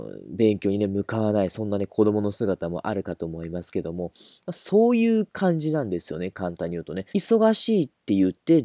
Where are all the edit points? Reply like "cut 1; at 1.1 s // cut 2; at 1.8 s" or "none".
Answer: cut 1; at 7.1 s